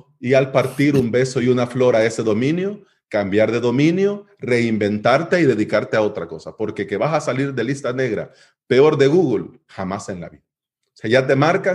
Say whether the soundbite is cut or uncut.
uncut